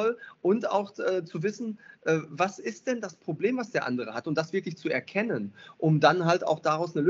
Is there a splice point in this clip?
no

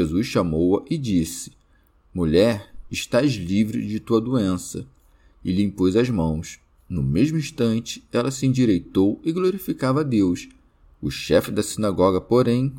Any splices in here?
no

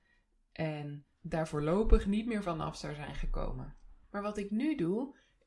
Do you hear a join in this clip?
yes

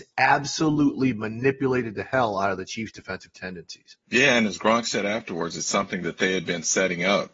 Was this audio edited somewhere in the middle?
yes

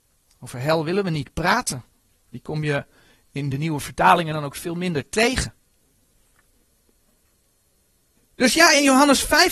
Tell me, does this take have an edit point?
no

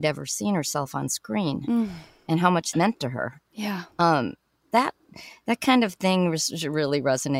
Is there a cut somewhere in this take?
yes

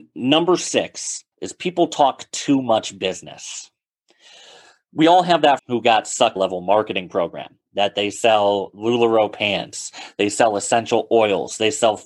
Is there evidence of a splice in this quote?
yes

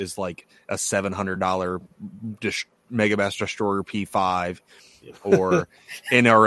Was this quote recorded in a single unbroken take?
yes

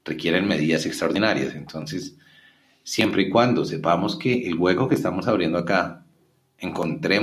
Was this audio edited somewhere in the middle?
no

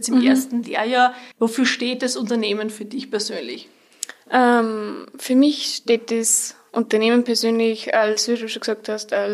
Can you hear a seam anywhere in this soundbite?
yes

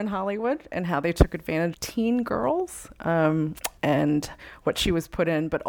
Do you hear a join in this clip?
yes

